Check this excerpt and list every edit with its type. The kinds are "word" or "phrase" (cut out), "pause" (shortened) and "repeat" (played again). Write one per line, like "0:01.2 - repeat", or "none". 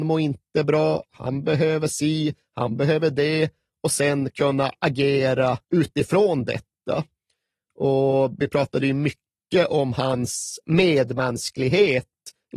0:05.6 - pause